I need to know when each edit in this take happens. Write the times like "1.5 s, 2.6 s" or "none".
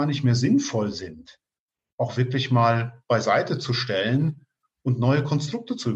none